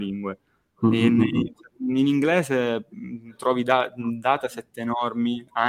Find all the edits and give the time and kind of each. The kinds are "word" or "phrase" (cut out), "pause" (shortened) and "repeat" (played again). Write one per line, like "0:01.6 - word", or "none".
none